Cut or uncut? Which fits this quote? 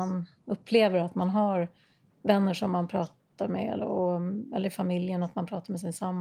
uncut